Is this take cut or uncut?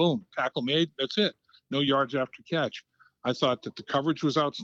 uncut